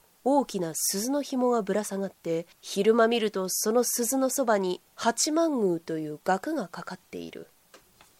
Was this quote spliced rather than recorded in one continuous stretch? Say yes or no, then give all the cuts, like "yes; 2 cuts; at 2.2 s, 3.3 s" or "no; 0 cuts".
yes; 2 cuts; at 2.5 s, 4.9 s